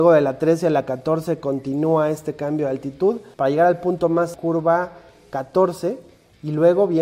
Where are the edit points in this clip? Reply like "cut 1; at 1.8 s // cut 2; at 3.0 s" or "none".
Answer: cut 1; at 3.3 s // cut 2; at 4.3 s